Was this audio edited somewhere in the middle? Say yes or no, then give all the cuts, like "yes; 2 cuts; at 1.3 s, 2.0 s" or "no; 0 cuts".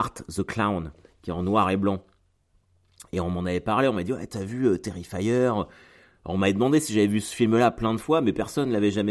no; 0 cuts